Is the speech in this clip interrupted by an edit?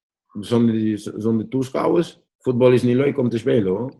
yes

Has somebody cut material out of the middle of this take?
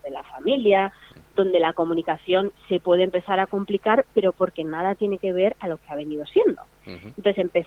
no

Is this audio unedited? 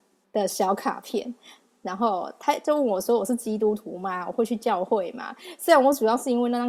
yes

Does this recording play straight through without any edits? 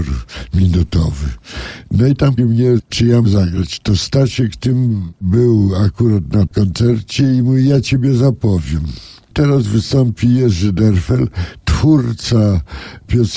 no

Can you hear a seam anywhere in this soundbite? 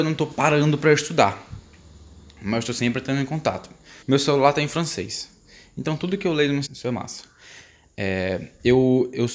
yes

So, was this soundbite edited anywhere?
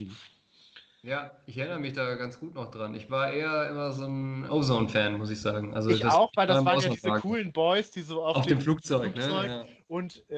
yes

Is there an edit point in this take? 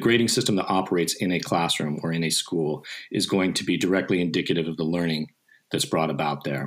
no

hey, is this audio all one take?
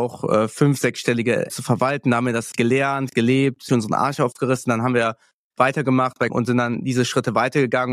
no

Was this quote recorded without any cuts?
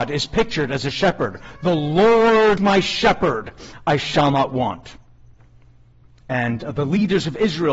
no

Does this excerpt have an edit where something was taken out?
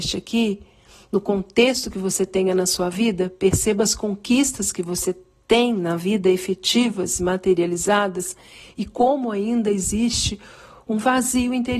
no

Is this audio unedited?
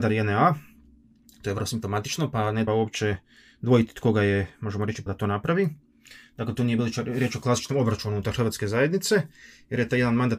no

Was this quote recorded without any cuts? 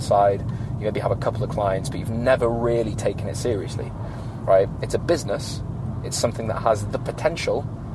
yes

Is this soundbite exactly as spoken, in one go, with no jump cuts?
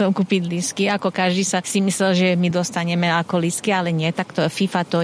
yes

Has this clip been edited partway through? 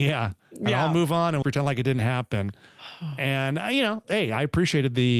yes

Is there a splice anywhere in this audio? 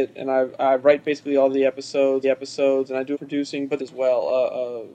yes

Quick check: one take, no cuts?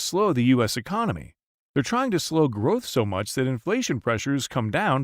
yes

